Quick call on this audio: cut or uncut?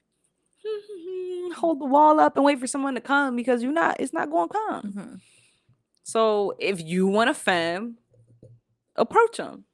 uncut